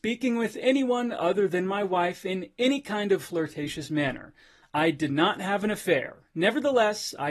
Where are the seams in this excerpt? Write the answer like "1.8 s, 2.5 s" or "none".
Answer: none